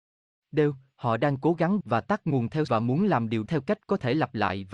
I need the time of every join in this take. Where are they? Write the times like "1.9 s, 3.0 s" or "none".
1.8 s, 2.7 s, 3.5 s